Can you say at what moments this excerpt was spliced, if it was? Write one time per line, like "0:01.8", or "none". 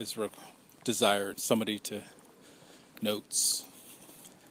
0:01.3
0:03.0

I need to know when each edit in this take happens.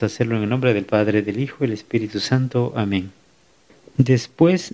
none

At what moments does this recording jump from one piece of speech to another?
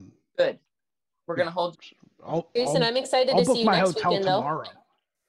0:01.7

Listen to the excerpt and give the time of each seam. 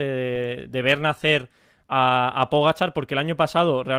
none

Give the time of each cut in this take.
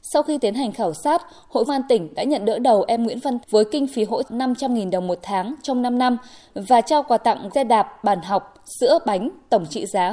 0:01.7
0:03.4
0:04.2
0:07.5

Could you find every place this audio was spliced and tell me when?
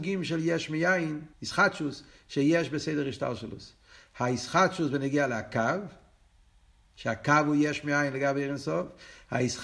0:01.3

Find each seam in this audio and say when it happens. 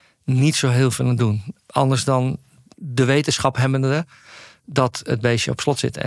none

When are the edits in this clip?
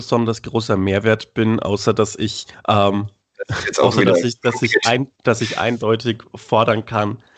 0:02.5
0:05.2

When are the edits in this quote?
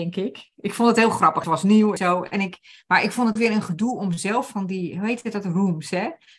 0:01.4
0:02.0
0:03.4

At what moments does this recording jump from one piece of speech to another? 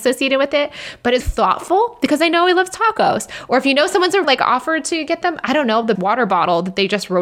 0:01.2
0:04.2
0:05.9

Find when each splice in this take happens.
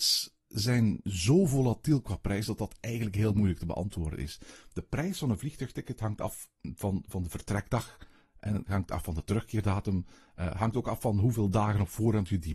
none

